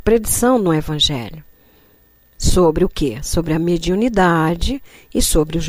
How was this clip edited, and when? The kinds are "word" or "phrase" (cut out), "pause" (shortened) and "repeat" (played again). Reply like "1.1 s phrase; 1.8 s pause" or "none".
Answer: none